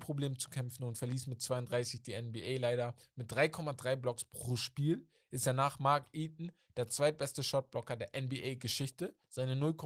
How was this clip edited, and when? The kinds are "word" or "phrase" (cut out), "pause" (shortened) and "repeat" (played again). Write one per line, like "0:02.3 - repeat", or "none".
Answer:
none

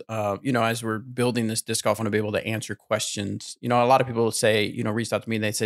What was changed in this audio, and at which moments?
0:02.0 - phrase

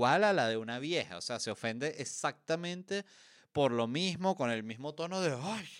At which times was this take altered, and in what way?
none

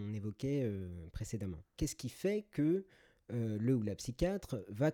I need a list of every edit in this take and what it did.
0:01.7 - pause

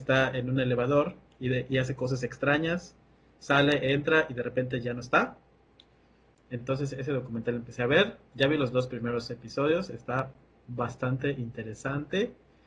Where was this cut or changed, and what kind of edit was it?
none

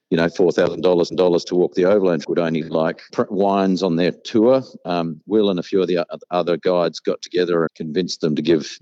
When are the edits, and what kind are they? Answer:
0:01.1 - repeat
0:02.2 - word
0:03.1 - phrase
0:07.7 - word

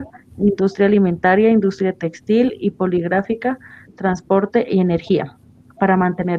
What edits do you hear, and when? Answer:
none

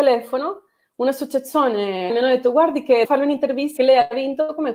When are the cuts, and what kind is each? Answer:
0:02.1 - word
0:03.0 - word
0:03.8 - word

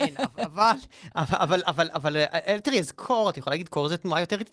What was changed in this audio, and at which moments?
none

